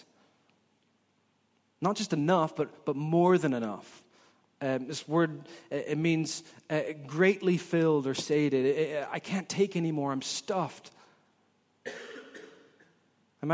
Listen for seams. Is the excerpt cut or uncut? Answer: uncut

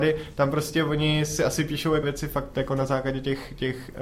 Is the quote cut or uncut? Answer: cut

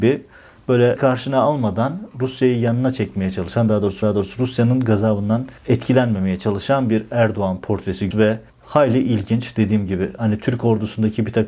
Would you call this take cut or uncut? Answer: cut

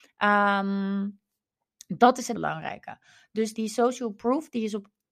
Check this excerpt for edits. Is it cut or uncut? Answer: cut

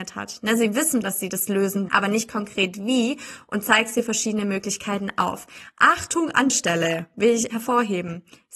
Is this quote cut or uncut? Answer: cut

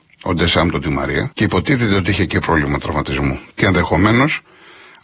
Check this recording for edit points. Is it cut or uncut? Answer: cut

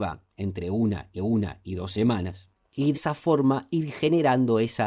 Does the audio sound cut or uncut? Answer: cut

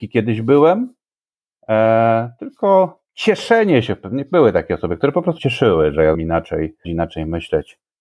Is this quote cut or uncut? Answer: cut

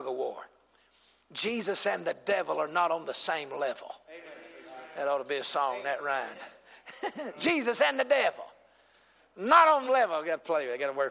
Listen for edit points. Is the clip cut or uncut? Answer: cut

